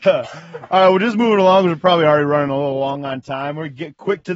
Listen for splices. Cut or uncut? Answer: uncut